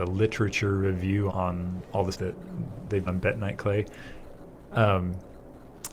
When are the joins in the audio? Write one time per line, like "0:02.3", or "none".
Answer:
0:01.3
0:02.1
0:03.1